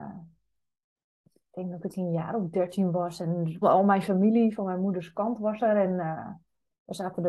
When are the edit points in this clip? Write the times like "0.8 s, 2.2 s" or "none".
3.6 s